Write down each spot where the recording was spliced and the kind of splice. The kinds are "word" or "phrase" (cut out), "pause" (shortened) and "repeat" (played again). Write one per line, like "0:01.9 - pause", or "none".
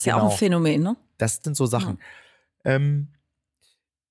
0:01.4 - phrase